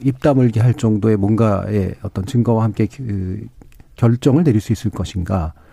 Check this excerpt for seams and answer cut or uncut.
uncut